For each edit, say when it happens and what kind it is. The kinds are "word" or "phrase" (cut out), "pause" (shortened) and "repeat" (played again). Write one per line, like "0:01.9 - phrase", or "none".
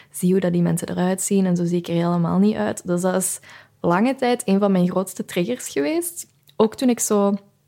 none